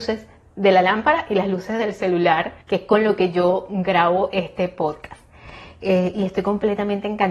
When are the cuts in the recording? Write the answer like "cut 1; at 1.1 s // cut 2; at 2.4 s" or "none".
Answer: cut 1; at 2.6 s